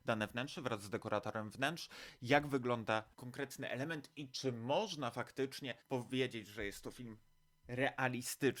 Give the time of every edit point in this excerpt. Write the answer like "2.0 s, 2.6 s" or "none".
3.1 s, 5.8 s